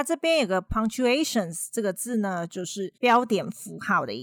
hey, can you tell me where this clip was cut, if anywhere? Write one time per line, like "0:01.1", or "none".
0:03.0